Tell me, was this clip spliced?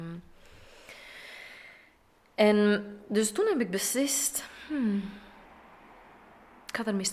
no; 0 cuts

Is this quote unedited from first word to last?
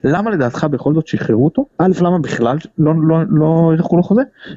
no; 1 cut; at 1.7 s

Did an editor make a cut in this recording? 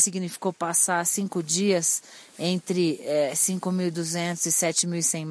no; 0 cuts

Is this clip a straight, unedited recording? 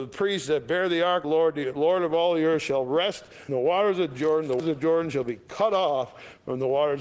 no; 3 cuts; at 1.2 s, 3.5 s, 4.6 s

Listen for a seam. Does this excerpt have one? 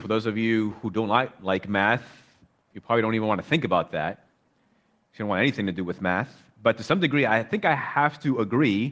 no; 0 cuts

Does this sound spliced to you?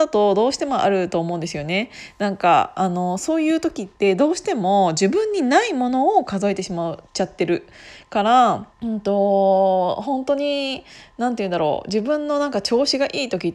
yes; 2 cuts; at 7.1 s, 8.7 s

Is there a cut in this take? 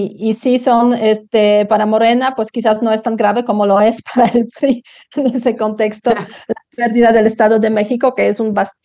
no; 0 cuts

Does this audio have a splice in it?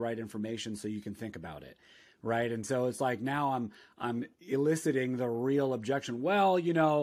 no; 0 cuts

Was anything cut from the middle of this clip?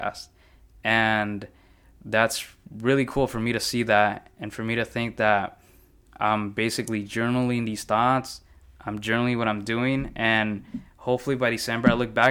no; 0 cuts

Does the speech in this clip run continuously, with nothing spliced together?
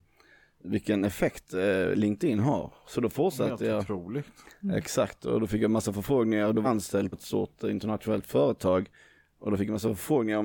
no; 2 cuts; at 6.6 s, 7.1 s

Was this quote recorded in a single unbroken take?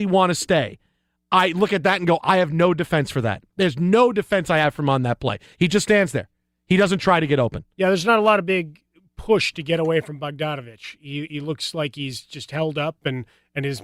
yes; 0 cuts

